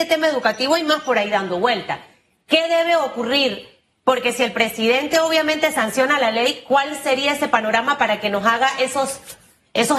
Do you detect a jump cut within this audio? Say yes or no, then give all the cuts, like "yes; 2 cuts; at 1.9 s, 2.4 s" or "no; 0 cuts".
no; 0 cuts